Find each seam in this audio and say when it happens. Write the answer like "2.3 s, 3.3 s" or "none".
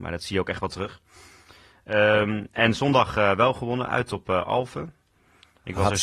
none